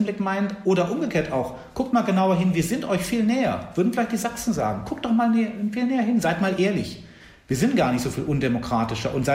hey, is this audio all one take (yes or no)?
yes